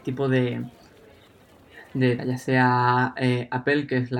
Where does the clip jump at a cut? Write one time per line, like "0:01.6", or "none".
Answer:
0:02.2